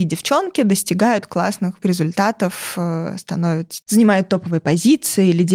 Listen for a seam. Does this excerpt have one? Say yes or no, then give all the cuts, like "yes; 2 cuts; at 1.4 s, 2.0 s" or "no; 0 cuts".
yes; 2 cuts; at 1.8 s, 3.8 s